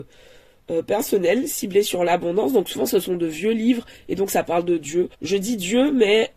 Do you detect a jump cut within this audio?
yes; 1 cut; at 5.1 s

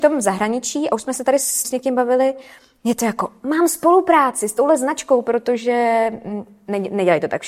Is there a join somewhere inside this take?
yes; 1 cut; at 1.6 s

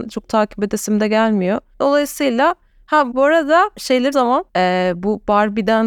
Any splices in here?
yes; 2 cuts; at 3.1 s, 4.1 s

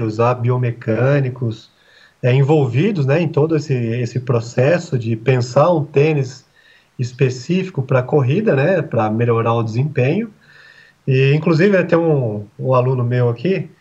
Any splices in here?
no; 0 cuts

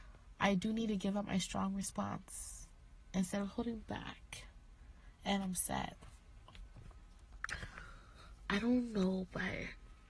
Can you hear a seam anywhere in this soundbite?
no; 0 cuts

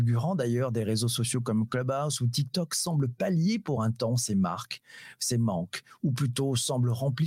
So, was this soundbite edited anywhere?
no; 0 cuts

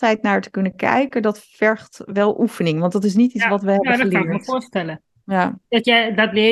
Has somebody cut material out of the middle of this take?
no; 0 cuts

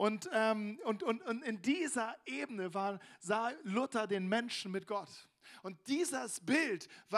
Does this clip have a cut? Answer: no; 0 cuts

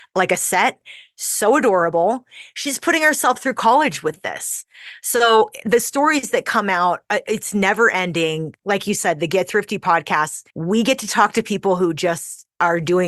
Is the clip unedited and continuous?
no; 1 cut; at 10.5 s

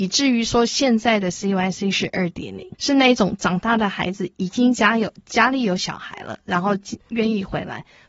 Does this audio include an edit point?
yes; 1 cut; at 2.7 s

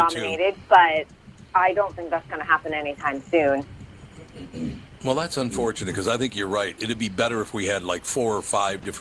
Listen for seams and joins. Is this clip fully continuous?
no; 1 cut; at 1.5 s

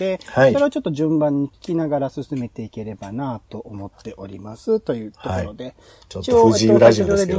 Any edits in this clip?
no; 0 cuts

